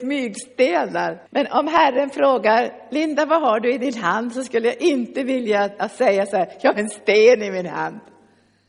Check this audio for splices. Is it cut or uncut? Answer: cut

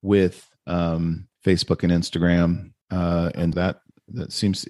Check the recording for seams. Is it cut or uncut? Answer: cut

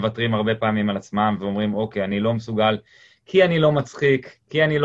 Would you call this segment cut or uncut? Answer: uncut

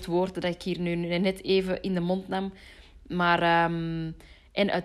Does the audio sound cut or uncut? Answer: uncut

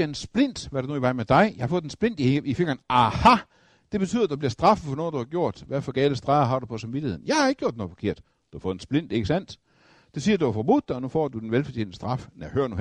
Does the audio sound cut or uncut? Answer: uncut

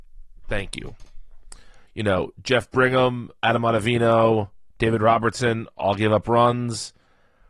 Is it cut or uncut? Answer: cut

